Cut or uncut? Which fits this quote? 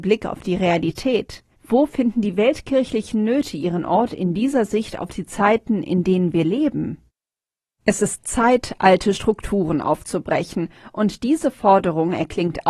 uncut